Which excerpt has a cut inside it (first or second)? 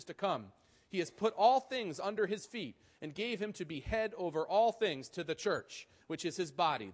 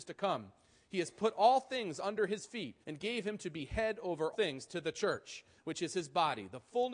second